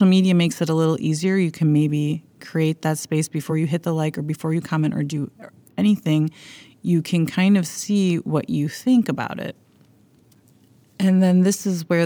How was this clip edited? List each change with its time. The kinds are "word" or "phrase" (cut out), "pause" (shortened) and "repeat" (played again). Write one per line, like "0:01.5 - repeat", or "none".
none